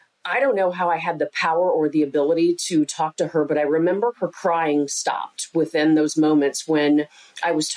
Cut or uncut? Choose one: uncut